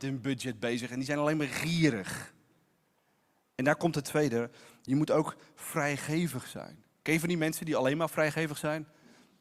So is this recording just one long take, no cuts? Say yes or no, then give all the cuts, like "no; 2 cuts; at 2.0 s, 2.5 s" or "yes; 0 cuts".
yes; 0 cuts